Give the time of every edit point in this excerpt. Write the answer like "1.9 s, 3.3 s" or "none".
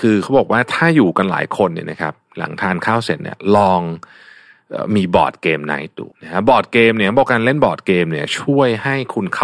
6.1 s

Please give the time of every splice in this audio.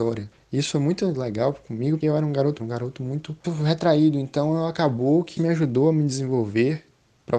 2.0 s, 2.6 s, 3.4 s, 5.4 s

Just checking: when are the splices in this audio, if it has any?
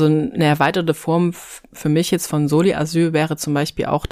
none

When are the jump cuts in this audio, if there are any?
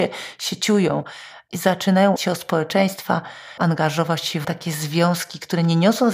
2.2 s, 3.6 s, 4.4 s

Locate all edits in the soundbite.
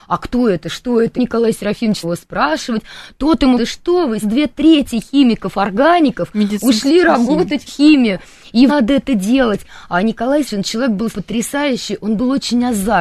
1.2 s, 2.0 s, 3.6 s, 4.2 s, 7.7 s, 8.7 s, 10.5 s, 11.1 s

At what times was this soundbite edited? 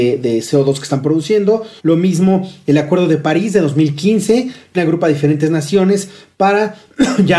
1.8 s, 4.7 s

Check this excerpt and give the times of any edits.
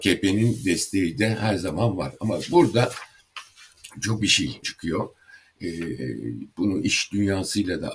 4.2 s, 4.6 s

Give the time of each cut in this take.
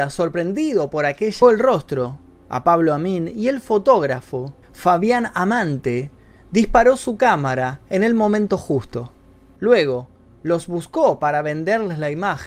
1.4 s, 4.6 s

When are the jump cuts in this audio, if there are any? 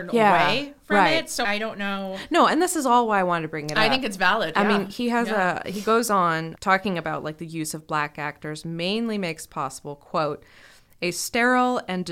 1.4 s, 6.6 s

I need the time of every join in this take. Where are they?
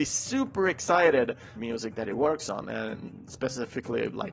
1.6 s

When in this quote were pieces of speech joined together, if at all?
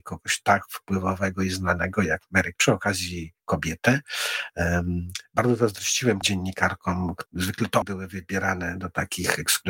2.6 s, 6.2 s, 7.3 s, 7.8 s

